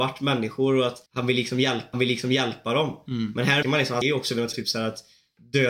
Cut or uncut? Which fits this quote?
cut